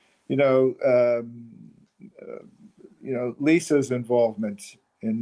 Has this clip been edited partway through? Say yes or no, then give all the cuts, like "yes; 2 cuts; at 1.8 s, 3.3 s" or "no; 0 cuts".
no; 0 cuts